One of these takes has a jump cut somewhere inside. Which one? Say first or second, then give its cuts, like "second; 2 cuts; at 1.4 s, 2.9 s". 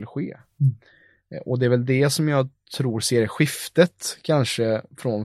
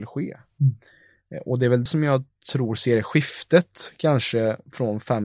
second; 1 cut; at 1.9 s